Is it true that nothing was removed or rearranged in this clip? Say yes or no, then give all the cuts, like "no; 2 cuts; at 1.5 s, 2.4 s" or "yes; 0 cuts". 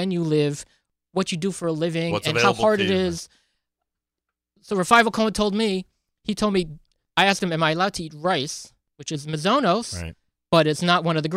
yes; 0 cuts